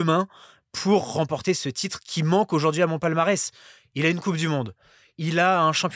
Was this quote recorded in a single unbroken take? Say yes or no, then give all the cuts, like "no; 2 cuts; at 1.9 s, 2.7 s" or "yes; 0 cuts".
yes; 0 cuts